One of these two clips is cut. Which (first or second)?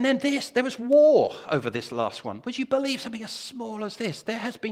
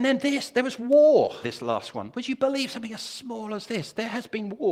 second